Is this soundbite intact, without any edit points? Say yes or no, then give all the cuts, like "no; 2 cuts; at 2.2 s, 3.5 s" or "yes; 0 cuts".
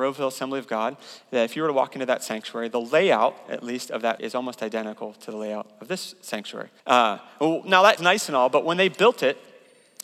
no; 3 cuts; at 4.2 s, 6.8 s, 8.0 s